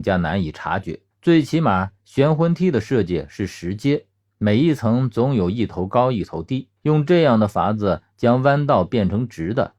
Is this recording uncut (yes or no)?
no